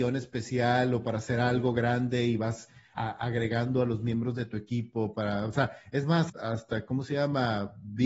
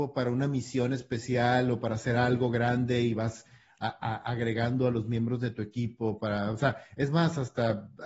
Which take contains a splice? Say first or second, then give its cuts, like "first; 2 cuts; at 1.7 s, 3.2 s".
first; 2 cuts; at 2.9 s, 6.3 s